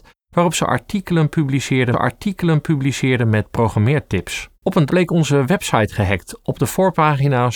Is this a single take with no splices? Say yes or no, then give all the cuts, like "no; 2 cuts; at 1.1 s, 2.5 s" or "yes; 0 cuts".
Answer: no; 3 cuts; at 1.9 s, 4.5 s, 4.9 s